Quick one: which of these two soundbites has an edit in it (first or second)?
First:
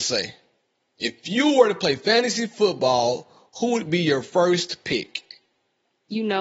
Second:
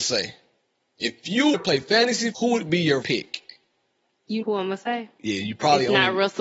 second